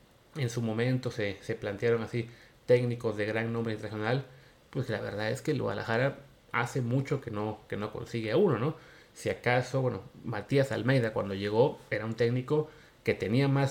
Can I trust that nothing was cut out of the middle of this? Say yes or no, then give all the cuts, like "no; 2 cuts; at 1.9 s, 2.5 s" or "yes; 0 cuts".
yes; 0 cuts